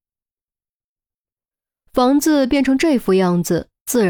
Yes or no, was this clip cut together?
no